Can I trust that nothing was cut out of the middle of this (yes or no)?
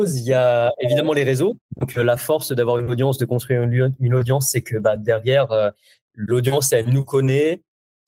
yes